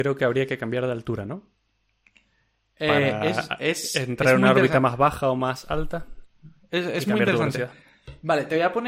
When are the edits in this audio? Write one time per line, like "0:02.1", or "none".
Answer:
none